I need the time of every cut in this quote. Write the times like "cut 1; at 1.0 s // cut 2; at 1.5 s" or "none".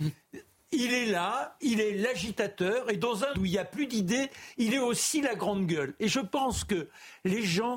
cut 1; at 3.3 s